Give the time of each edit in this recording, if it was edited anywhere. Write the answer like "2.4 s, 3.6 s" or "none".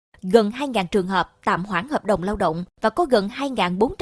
2.7 s